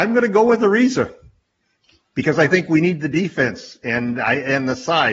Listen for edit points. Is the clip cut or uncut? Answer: uncut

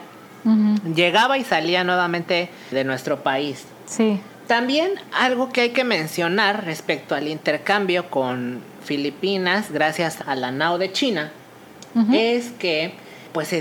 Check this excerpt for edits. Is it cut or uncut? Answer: cut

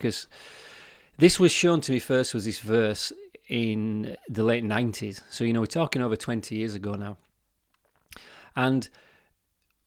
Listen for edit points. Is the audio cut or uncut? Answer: uncut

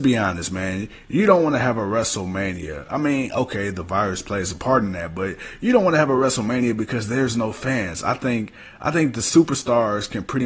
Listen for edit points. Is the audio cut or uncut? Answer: uncut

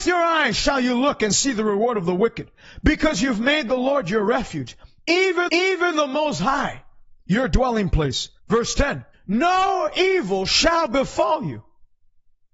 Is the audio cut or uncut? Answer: cut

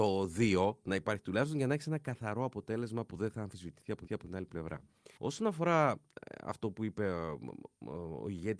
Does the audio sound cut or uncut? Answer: cut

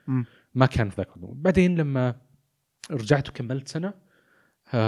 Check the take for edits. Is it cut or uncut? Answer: uncut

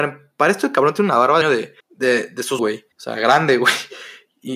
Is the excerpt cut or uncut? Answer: cut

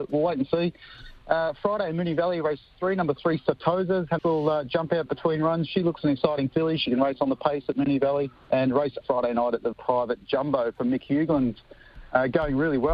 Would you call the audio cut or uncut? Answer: cut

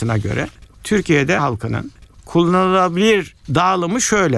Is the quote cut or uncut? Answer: cut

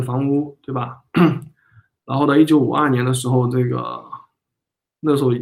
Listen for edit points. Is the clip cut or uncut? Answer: uncut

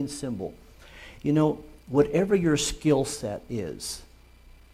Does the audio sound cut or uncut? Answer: cut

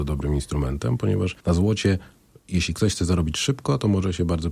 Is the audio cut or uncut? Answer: cut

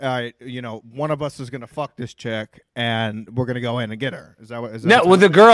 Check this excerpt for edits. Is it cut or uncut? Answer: uncut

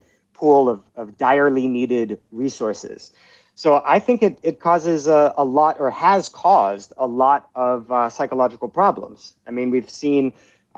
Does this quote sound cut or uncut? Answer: uncut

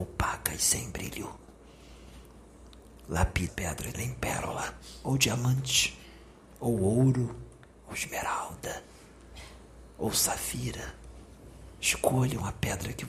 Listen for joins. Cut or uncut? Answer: cut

